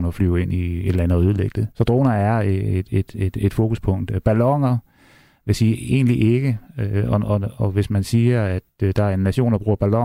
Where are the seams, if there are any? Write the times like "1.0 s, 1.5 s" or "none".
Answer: 1.7 s